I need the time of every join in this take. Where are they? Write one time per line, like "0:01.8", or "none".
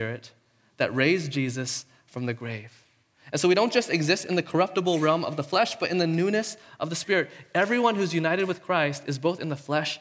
none